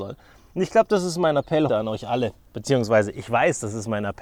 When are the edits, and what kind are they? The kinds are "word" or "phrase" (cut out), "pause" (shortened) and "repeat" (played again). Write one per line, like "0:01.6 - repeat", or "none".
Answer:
0:01.7 - word